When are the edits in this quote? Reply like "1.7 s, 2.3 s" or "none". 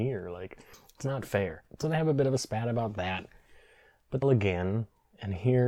1.7 s, 4.2 s

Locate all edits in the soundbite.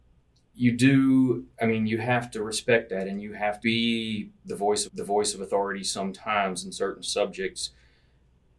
1.5 s, 3.6 s, 4.9 s

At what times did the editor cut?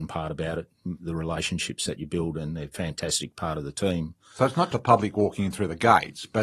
4.7 s

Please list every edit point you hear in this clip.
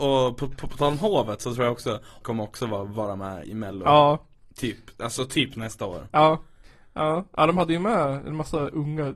2.2 s, 3.4 s

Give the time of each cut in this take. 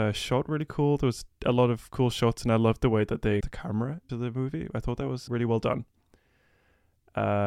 3.4 s, 4.1 s, 5.3 s

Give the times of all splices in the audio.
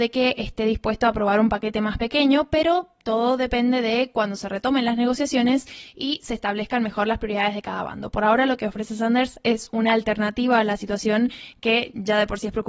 none

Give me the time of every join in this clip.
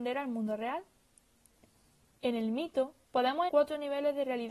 3.5 s

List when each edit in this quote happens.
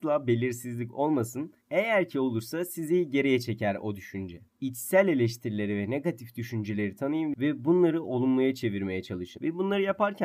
1.6 s, 4.5 s

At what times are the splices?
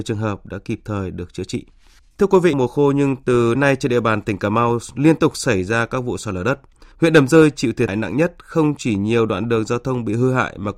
2.0 s, 2.5 s, 3.5 s, 6.9 s, 7.9 s

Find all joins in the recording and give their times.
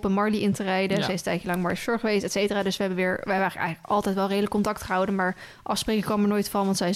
none

